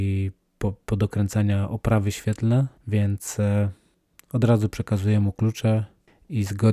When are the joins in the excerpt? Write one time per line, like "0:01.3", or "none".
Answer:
0:02.8